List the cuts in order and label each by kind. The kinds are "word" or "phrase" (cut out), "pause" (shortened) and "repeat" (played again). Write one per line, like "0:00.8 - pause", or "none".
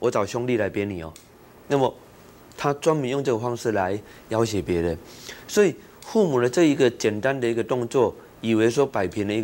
none